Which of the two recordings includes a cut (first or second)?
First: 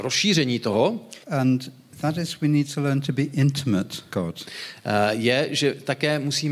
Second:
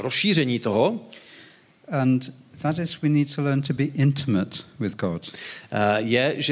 first